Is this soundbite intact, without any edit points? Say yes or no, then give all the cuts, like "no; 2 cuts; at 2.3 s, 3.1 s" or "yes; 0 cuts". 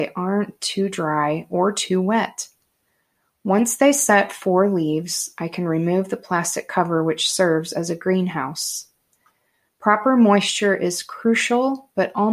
yes; 0 cuts